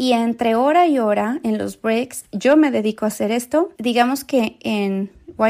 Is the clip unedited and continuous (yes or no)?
no